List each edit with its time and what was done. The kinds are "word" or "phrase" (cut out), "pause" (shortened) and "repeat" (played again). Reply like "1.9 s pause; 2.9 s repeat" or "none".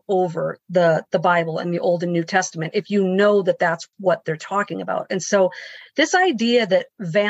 none